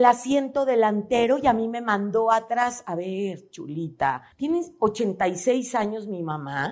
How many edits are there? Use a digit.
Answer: 1